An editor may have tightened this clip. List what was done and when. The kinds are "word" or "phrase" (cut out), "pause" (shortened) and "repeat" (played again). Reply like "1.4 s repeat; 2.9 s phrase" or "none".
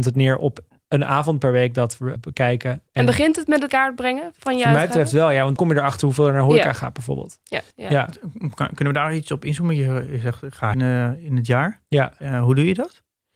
2.2 s word; 2.9 s pause; 3.7 s word; 5.6 s word; 7.7 s pause; 10.7 s phrase